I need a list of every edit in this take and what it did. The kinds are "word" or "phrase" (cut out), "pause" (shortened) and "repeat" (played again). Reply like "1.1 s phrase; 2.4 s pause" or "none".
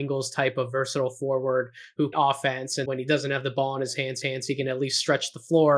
2.1 s phrase; 2.9 s word; 4.2 s repeat